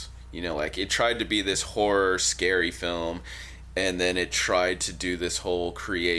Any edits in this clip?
no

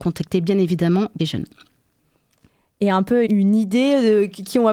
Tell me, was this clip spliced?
yes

